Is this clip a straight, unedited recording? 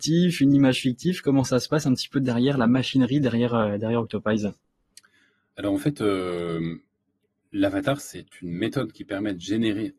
yes; 0 cuts

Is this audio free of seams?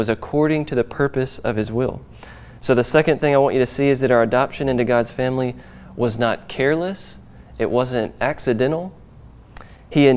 yes; 0 cuts

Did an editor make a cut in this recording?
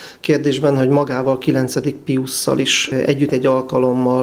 yes; 1 cut; at 3.3 s

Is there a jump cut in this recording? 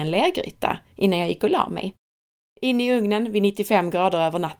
no; 0 cuts

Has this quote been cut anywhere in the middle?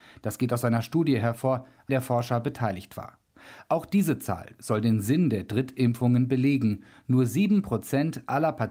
yes; 1 cut; at 1.9 s

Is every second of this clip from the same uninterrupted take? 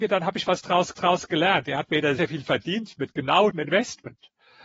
no; 4 cuts; at 0.9 s, 1.9 s, 2.2 s, 3.5 s

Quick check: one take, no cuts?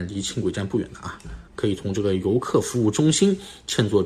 yes; 0 cuts

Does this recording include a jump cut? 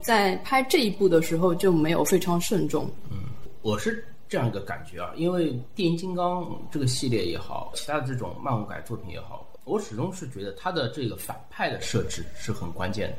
yes; 1 cut; at 7.7 s

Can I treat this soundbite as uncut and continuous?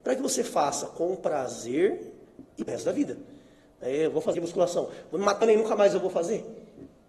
no; 3 cuts; at 2.7 s, 4.3 s, 5.4 s

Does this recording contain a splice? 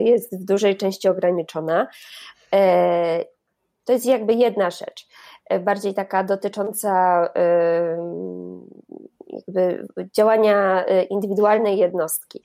no; 0 cuts

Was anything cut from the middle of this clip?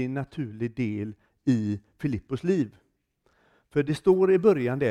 no; 0 cuts

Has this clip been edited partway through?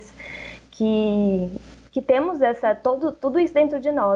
no; 0 cuts

